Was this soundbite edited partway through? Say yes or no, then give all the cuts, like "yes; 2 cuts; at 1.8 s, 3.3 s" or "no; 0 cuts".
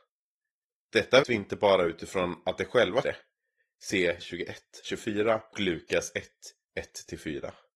yes; 5 cuts; at 1.2 s, 3.0 s, 4.2 s, 4.8 s, 5.5 s